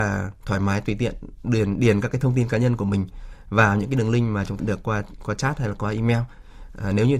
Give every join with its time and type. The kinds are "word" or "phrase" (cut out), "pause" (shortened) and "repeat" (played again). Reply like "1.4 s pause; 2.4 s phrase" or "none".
4.6 s word